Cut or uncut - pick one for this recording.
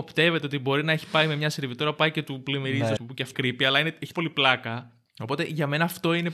cut